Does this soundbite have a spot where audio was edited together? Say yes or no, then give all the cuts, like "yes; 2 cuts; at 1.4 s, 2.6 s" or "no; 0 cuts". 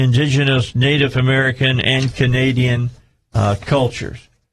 no; 0 cuts